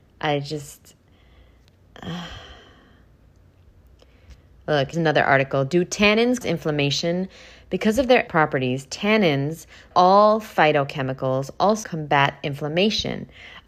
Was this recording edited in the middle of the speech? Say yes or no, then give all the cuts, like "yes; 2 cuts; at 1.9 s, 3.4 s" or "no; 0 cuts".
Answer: yes; 5 cuts; at 4.9 s, 6.4 s, 8.3 s, 9.9 s, 11.8 s